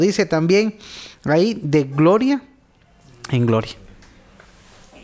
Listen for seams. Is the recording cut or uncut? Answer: uncut